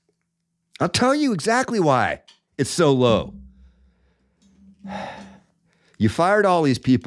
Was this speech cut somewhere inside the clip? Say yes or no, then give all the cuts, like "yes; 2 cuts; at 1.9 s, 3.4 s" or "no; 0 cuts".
no; 0 cuts